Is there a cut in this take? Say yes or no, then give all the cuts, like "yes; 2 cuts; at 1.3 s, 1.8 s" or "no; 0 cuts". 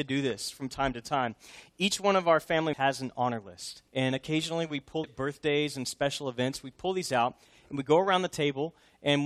yes; 3 cuts; at 2.7 s, 3.9 s, 5.0 s